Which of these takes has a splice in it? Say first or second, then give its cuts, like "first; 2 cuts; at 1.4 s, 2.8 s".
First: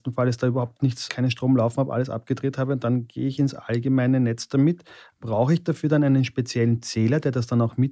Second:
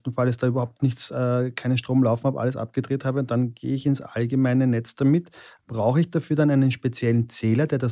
first; 1 cut; at 1.1 s